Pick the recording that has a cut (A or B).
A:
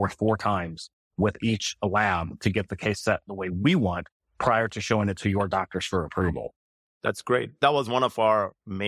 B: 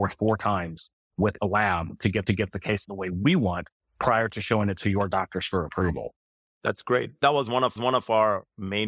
B